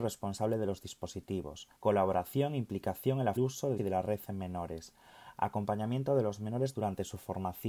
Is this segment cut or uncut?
cut